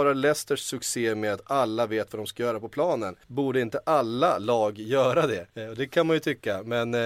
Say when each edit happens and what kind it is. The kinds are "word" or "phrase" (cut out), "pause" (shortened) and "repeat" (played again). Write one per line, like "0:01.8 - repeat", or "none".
0:03.2 - pause
0:05.5 - pause